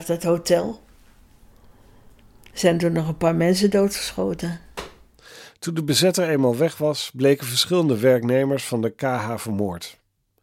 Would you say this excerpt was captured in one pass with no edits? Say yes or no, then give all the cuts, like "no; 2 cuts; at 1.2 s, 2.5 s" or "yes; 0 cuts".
yes; 0 cuts